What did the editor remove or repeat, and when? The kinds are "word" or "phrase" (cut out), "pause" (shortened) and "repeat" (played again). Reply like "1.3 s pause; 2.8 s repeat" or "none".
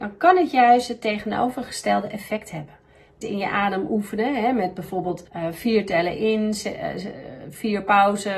3.2 s phrase; 5.3 s pause

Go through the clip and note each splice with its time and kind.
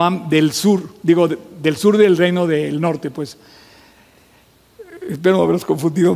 none

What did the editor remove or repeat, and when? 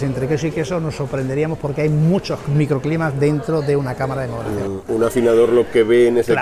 none

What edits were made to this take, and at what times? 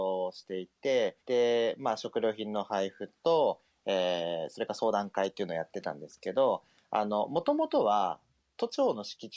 1.2 s pause

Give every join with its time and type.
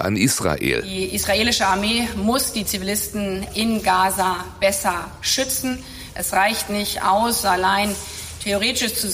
none

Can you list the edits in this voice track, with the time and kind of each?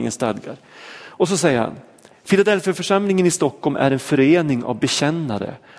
none

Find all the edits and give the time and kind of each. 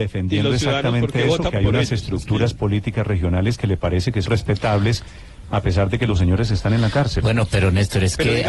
4.3 s word

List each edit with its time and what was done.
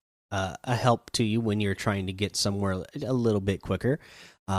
none

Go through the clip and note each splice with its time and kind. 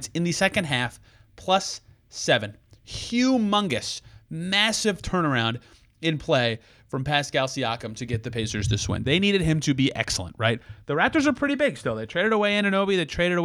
none

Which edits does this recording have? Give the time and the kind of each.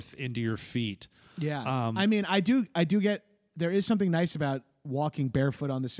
none

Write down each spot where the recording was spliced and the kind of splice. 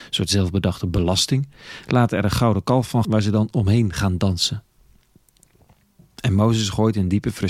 3.0 s word

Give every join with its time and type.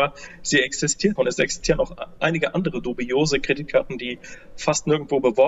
1.2 s word

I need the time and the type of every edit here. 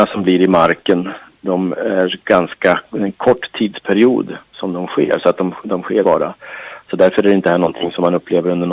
4.4 s pause; 6.0 s phrase

